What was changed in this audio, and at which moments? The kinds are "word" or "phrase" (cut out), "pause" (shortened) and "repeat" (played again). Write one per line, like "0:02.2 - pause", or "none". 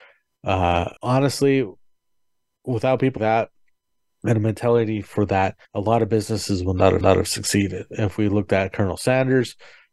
0:01.0 - pause
0:03.2 - word
0:05.6 - pause
0:07.0 - repeat